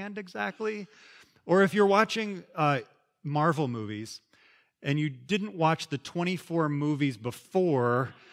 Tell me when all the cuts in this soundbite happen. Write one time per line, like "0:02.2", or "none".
none